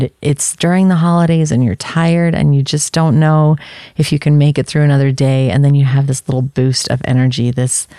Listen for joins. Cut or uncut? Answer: uncut